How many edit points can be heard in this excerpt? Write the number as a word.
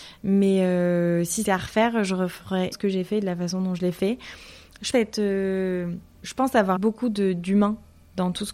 five